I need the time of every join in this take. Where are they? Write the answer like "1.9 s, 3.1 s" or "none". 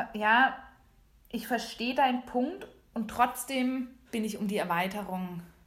2.9 s, 4.0 s